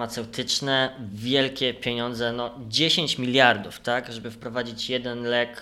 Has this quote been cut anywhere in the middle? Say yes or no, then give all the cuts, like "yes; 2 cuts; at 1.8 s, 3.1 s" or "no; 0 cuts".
no; 0 cuts